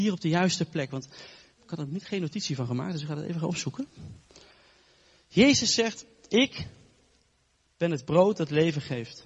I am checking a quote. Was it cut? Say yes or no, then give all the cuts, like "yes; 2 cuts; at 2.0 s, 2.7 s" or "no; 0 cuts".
no; 0 cuts